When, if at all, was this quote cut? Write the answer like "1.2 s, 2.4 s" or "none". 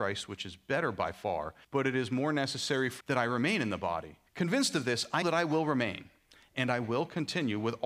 1.6 s, 3.0 s, 4.3 s, 5.2 s